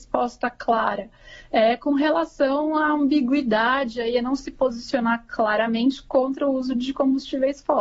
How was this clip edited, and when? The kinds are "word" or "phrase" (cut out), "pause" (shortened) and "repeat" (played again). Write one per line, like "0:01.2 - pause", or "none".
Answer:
none